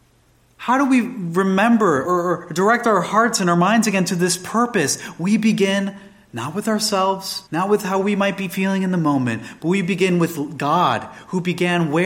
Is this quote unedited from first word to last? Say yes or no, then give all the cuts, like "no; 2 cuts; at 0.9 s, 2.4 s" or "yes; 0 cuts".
no; 2 cuts; at 2.0 s, 7.5 s